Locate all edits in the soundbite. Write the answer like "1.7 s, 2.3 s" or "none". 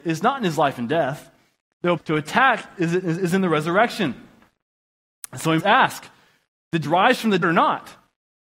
2.0 s, 5.6 s, 6.8 s, 7.4 s